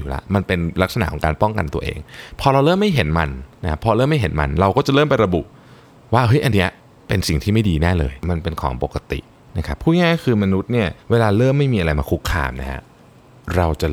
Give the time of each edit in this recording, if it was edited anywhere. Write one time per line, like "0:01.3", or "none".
0:03.5
0:06.8
0:11.0